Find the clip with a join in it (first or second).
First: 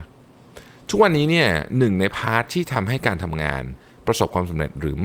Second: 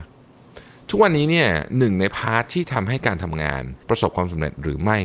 second